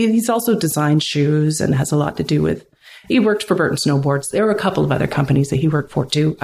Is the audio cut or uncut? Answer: uncut